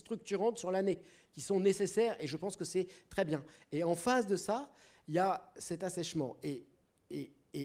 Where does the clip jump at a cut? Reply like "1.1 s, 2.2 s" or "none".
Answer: none